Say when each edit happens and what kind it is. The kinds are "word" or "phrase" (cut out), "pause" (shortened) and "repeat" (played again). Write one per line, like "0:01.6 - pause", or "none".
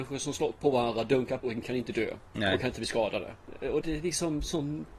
0:01.4 - word
0:03.8 - word